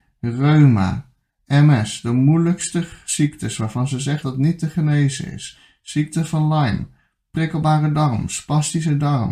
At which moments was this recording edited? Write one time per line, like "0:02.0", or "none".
0:04.2